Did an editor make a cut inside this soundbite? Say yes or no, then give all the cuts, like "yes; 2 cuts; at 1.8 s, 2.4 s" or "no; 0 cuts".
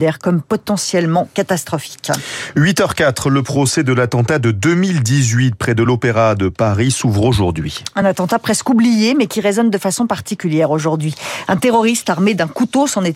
no; 0 cuts